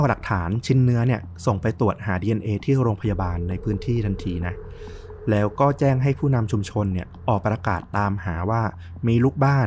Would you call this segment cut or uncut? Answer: uncut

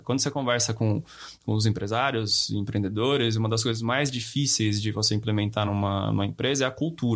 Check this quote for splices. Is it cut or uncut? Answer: uncut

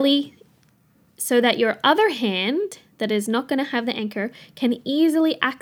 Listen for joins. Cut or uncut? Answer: uncut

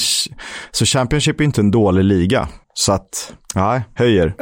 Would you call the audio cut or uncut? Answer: cut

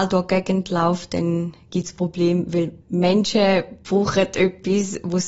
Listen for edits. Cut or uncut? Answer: cut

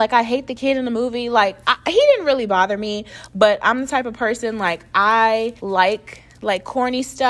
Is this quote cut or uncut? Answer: cut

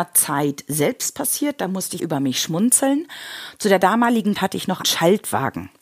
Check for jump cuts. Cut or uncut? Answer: cut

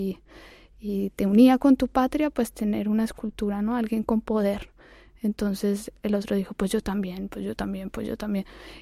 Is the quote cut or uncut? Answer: uncut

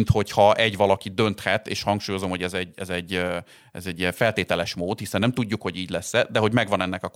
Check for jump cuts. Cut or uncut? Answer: uncut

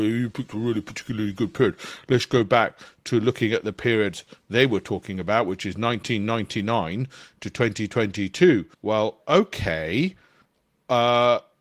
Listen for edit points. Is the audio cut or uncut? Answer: cut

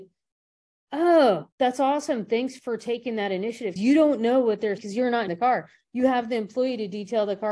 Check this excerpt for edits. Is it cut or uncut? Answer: cut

